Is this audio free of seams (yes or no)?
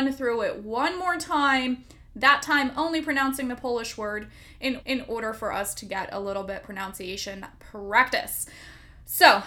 no